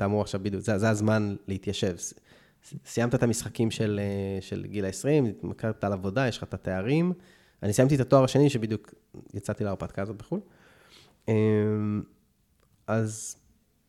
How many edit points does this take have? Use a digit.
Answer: 0